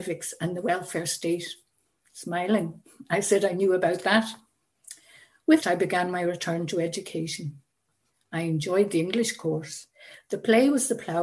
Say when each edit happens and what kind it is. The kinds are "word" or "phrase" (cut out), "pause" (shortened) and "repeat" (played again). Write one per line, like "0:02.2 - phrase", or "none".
0:05.6 - word